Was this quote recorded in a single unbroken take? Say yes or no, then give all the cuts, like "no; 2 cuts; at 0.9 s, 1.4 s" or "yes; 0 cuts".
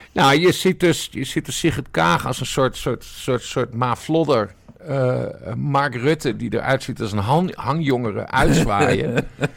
yes; 0 cuts